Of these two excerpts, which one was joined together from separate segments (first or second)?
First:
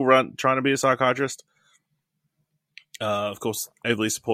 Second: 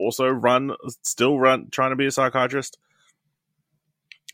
second